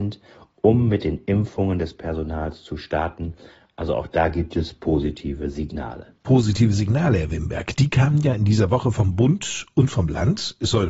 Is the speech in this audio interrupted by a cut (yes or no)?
no